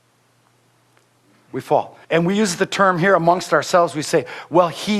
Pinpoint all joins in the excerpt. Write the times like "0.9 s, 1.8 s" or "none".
2.0 s